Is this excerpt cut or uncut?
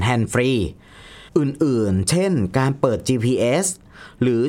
cut